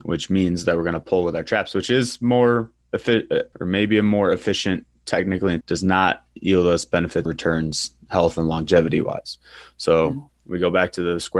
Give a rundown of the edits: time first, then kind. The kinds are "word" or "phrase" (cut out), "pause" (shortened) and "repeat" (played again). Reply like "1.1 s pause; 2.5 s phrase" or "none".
3.5 s word; 5.6 s phrase; 7.3 s word